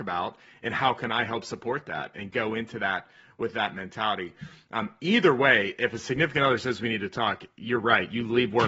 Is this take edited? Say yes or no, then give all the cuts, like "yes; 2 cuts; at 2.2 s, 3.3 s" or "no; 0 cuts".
no; 0 cuts